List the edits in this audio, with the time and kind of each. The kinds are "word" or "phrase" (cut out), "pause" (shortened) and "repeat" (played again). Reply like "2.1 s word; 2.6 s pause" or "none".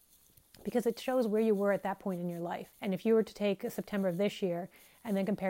2.7 s pause